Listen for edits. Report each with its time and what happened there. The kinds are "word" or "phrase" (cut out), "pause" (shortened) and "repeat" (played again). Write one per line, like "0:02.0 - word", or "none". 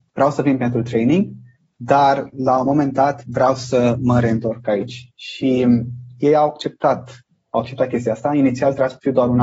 none